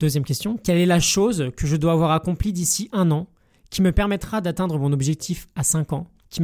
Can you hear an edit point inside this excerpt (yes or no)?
no